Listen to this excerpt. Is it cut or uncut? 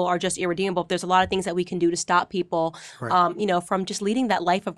uncut